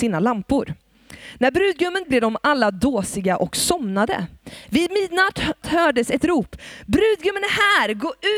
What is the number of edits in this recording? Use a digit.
3